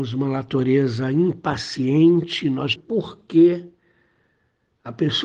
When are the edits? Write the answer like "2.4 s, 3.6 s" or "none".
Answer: 2.8 s